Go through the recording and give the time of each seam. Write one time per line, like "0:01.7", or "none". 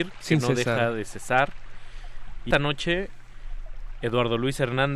0:02.5

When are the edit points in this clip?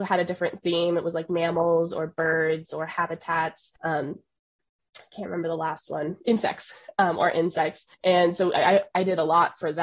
0:03.8
0:07.9

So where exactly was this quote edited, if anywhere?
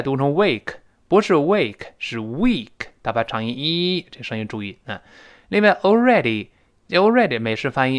none

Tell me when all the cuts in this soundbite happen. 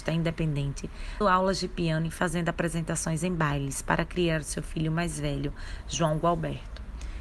0:01.2

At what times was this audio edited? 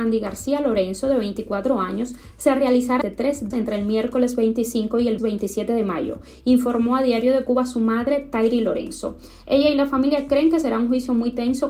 0:03.0
0:03.5
0:05.2

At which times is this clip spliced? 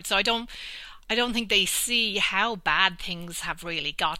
0:01.0

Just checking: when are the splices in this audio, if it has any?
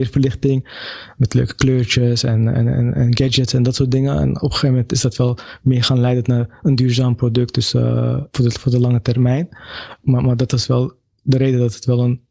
none

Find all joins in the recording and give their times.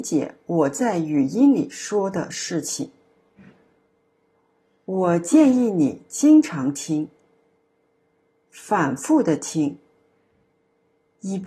none

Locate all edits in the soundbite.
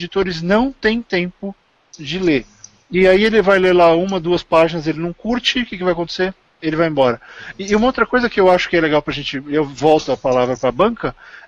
none

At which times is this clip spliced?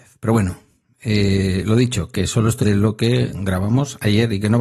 0:02.6

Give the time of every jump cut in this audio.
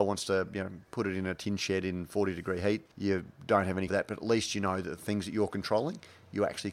0:02.9
0:03.9

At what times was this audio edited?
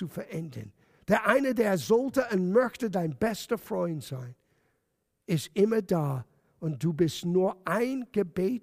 none

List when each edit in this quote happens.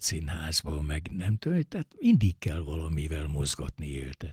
none

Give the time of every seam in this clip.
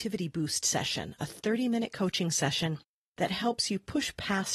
none

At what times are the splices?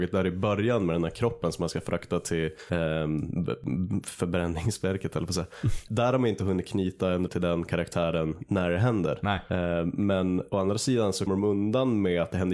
0:05.9
0:07.3
0:11.3

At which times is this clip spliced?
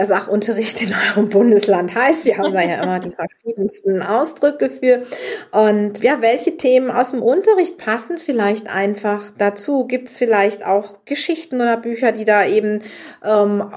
0:06.0

